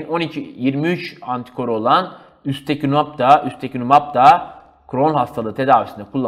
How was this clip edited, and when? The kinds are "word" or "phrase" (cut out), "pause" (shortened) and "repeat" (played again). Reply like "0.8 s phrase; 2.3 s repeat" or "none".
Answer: none